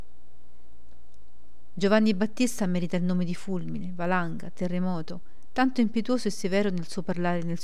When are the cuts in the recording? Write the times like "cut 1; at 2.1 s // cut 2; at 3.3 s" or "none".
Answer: none